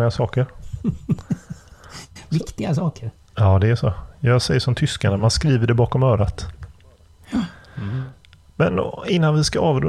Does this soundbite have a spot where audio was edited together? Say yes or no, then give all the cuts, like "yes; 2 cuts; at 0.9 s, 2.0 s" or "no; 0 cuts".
no; 0 cuts